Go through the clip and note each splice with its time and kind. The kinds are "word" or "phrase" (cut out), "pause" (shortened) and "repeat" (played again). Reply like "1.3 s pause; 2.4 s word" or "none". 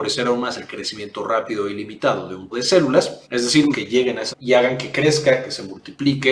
2.5 s word; 3.2 s pause; 3.7 s word; 4.3 s word